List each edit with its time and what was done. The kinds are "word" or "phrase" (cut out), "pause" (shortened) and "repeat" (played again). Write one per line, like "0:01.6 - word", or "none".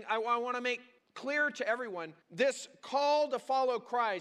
0:01.0 - pause
0:02.2 - pause